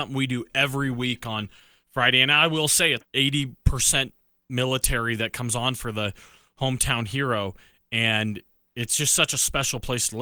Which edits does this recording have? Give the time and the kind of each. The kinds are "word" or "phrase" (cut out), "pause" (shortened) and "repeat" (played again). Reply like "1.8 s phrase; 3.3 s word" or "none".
3.0 s word